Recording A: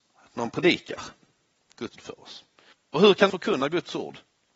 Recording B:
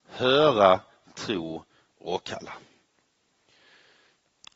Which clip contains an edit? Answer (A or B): A